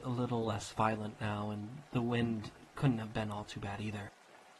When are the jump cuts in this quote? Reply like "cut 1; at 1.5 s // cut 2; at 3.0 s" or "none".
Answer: cut 1; at 1.9 s